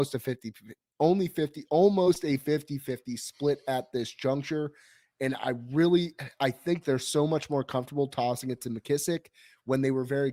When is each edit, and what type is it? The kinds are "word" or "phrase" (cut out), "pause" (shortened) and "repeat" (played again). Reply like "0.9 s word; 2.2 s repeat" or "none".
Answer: none